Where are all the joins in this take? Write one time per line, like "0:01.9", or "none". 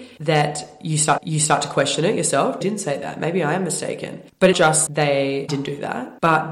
0:01.2
0:02.6
0:04.5
0:04.9